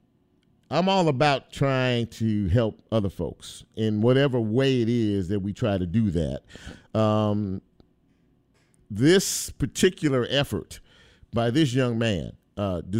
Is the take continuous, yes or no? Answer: yes